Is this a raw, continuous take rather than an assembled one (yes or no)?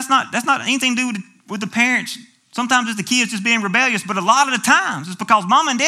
yes